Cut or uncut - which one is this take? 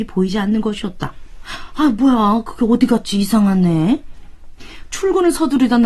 uncut